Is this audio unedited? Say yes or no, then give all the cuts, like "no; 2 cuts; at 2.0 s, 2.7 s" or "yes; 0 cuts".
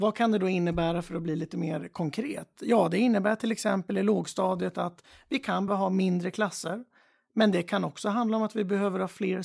no; 1 cut; at 5.7 s